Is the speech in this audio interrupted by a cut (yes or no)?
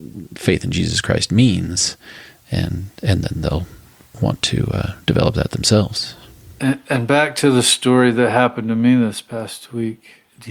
no